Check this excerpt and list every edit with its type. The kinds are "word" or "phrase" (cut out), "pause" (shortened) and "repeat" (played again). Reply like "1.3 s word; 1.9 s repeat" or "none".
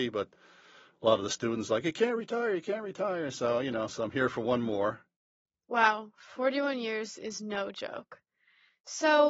none